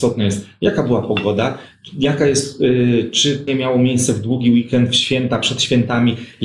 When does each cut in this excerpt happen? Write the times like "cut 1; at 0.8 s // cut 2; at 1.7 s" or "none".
cut 1; at 3.5 s